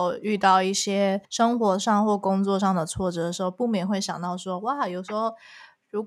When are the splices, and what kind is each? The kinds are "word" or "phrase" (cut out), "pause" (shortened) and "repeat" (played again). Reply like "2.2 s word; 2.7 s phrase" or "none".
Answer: 1.2 s pause

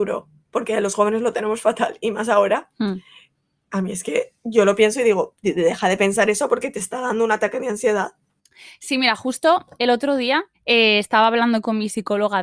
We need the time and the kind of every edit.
10.5 s pause

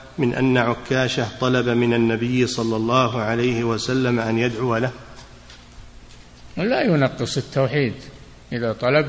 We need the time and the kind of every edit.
none

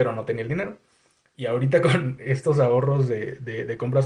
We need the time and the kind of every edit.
none

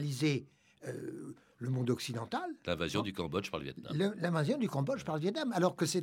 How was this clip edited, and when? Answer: none

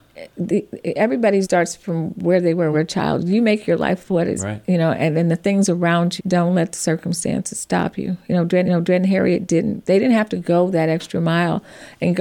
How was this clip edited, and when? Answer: 1.4 s word; 2.7 s phrase; 4.4 s word; 6.2 s word; 8.6 s repeat

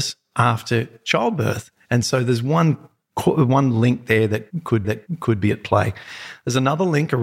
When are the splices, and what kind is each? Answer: 4.8 s repeat

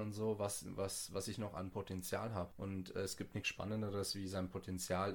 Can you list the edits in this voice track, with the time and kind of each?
none

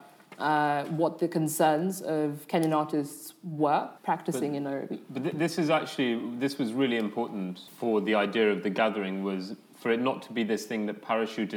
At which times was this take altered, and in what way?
4.0 s pause; 7.7 s word

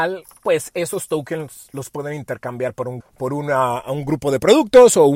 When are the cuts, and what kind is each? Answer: 3.0 s word

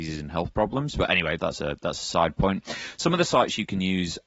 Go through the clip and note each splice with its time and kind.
1.4 s word

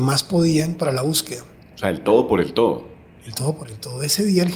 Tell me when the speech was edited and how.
none

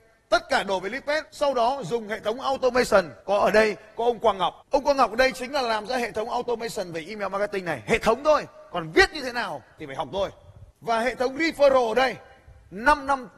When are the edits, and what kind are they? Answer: 1.3 s pause; 3.2 s pause; 4.6 s pause; 10.7 s pause

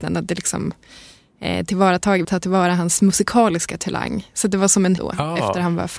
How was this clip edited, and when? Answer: 2.2 s word; 5.0 s word

